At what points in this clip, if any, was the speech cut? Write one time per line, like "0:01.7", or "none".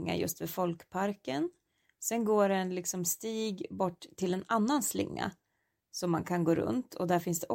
none